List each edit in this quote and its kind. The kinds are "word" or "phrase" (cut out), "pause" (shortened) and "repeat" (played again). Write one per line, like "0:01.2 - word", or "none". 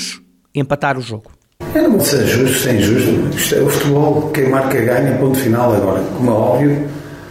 0:02.0 - word